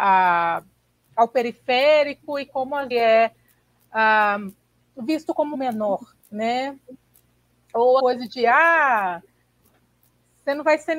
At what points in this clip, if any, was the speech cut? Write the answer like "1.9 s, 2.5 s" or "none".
2.9 s, 4.7 s, 5.5 s, 7.0 s, 8.0 s